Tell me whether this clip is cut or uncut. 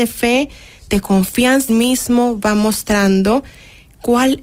cut